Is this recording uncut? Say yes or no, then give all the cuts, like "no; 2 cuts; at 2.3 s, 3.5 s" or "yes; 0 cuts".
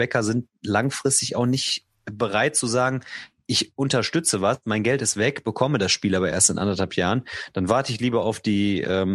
yes; 0 cuts